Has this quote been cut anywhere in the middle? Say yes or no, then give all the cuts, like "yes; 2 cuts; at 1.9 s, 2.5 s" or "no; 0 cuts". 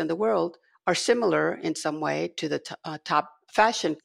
no; 0 cuts